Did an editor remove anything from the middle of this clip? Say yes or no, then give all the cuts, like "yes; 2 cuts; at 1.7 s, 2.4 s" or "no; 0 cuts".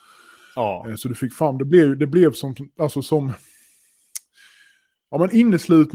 no; 0 cuts